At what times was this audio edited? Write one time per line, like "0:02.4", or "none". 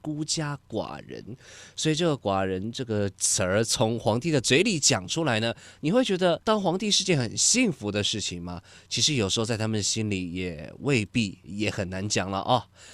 0:06.4